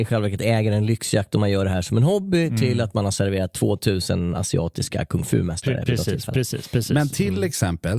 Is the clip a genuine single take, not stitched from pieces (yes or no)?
yes